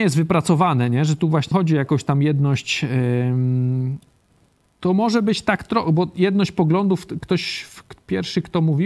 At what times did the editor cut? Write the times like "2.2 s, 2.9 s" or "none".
1.5 s